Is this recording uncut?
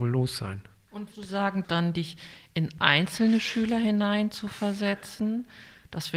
no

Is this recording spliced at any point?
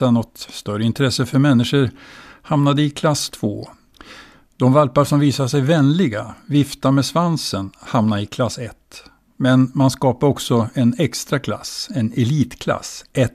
no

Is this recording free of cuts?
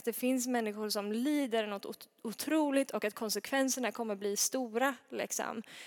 yes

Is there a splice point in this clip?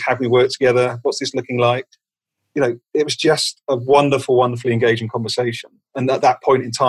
no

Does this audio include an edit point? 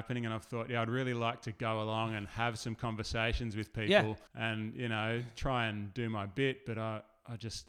yes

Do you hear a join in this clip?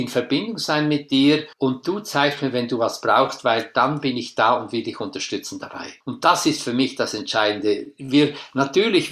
yes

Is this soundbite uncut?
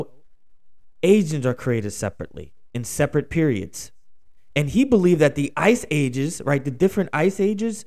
yes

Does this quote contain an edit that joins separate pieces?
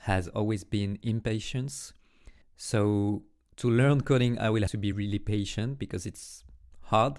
yes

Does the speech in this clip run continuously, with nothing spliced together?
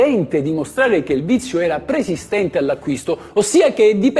yes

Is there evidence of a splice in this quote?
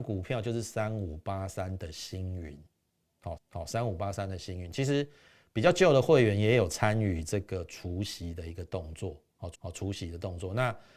yes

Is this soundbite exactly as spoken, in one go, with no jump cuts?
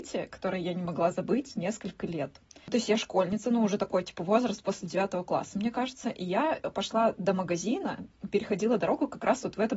yes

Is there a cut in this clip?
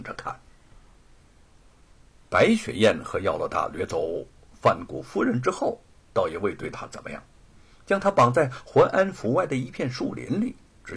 no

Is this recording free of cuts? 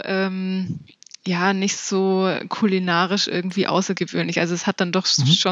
yes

